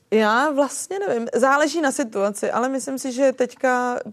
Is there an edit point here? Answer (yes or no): no